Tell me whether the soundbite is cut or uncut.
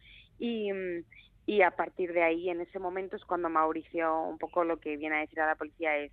uncut